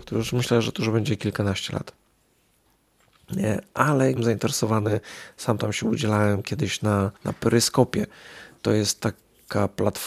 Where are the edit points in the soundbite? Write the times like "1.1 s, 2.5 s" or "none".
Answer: 4.2 s, 7.2 s